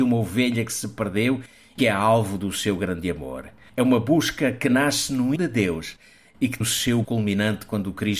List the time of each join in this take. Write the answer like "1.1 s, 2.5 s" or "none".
1.8 s, 5.4 s, 6.6 s, 7.0 s